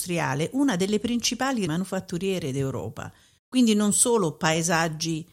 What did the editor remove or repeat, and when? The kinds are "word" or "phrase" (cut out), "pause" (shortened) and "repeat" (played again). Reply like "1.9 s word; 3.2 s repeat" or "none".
1.7 s word